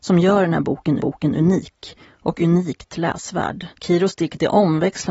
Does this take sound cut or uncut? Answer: cut